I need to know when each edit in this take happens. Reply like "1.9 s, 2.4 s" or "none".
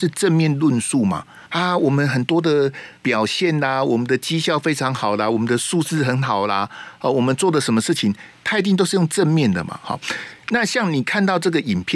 1.5 s, 3.0 s